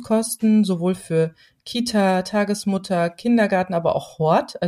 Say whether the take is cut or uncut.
uncut